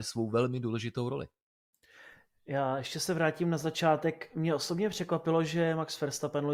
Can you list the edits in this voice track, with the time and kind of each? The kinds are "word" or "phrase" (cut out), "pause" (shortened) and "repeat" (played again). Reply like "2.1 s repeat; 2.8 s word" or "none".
none